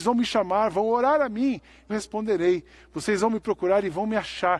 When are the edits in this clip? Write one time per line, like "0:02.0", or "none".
0:01.9